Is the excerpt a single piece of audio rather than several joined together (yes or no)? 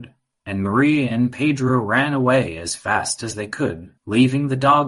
no